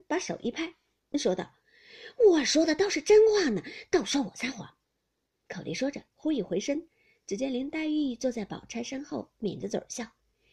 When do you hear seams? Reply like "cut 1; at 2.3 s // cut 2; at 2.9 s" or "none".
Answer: cut 1; at 4.8 s